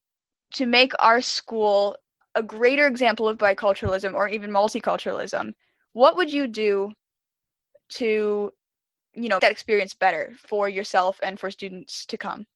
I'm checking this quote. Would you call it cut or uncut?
cut